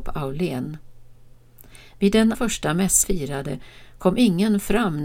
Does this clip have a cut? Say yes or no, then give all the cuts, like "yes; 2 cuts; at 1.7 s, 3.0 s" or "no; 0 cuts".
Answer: yes; 2 cuts; at 2.3 s, 3.0 s